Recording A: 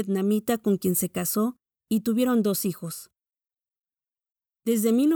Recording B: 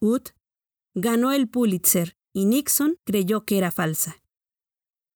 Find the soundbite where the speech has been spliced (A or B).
B